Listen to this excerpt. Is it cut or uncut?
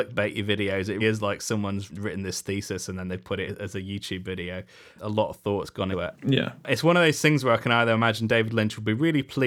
cut